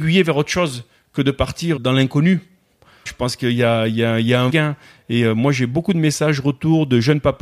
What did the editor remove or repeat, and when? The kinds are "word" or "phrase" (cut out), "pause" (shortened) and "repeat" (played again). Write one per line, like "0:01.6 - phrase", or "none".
0:01.8 - word
0:03.1 - word
0:04.5 - word